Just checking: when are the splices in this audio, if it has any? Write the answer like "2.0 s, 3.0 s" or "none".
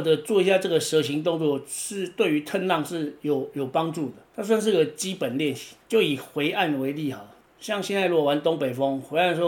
5.8 s

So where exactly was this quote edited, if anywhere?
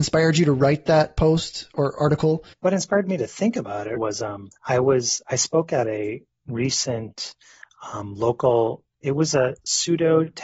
4.0 s, 4.6 s

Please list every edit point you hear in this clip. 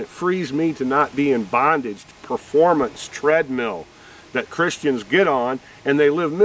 2.1 s

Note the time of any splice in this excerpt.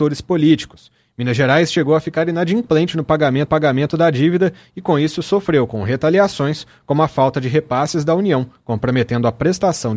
3.5 s

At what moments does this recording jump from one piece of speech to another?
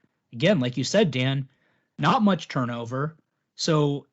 none

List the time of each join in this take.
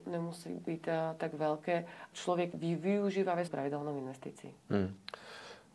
2.1 s, 2.5 s, 3.5 s

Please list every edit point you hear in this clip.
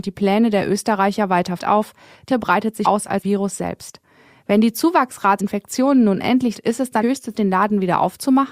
1.6 s, 2.3 s, 2.8 s, 3.2 s, 5.4 s, 6.5 s, 7.0 s, 7.3 s

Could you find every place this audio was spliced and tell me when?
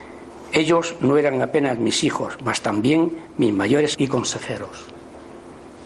3.9 s

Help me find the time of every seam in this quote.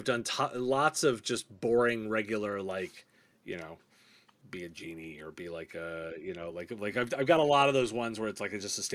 none

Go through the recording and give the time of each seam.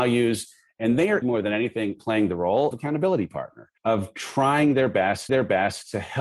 1.2 s, 2.0 s, 2.7 s, 3.8 s, 5.3 s

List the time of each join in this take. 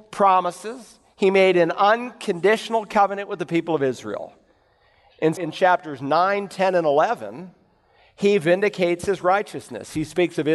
5.4 s

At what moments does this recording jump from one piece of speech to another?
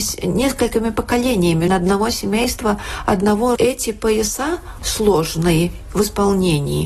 1.7 s, 3.6 s, 4.8 s

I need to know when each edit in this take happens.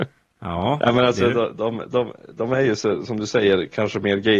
none

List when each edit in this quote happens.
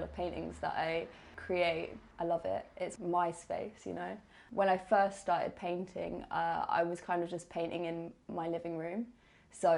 none

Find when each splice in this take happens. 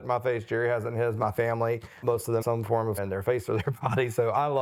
2.0 s, 2.4 s, 3.0 s

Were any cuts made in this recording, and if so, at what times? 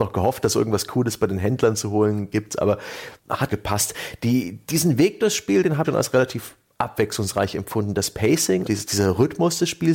3.5 s, 5.8 s, 8.6 s

